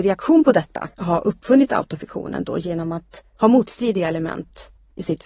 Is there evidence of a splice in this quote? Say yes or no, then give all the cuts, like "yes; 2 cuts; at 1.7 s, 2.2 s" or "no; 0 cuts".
yes; 1 cut; at 0.9 s